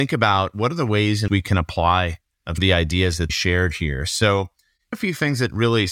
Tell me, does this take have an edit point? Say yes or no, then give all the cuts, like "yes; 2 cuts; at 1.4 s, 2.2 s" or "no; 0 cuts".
yes; 4 cuts; at 1.3 s, 2.6 s, 3.3 s, 4.9 s